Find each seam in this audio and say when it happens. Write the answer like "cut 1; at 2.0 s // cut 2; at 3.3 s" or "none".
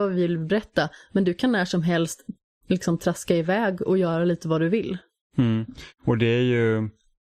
none